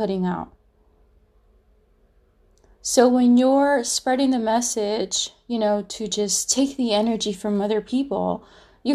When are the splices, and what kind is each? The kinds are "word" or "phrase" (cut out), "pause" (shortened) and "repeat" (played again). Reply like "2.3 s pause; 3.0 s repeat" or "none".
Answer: none